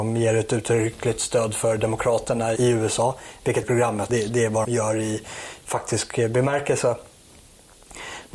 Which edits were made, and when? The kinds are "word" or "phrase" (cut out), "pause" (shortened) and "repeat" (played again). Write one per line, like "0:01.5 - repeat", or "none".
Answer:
0:02.6 - word
0:03.6 - phrase
0:04.1 - phrase
0:04.6 - word